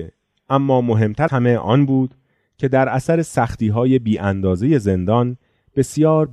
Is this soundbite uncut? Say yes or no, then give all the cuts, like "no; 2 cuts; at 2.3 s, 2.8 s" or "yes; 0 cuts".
no; 1 cut; at 1.3 s